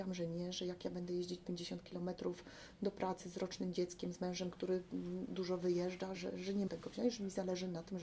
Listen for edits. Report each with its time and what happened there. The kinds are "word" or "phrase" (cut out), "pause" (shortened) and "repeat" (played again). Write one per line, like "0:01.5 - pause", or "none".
0:06.1 - word
0:06.7 - word